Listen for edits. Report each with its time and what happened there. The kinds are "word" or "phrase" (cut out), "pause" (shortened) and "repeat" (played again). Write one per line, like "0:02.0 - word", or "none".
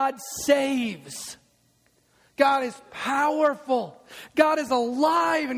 none